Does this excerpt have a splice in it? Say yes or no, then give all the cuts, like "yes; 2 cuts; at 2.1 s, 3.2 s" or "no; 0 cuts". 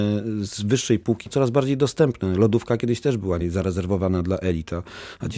yes; 2 cuts; at 1.3 s, 3.4 s